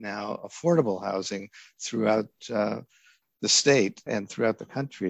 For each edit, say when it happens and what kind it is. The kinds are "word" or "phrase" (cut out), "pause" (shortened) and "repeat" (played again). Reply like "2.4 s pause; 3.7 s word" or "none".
4.1 s word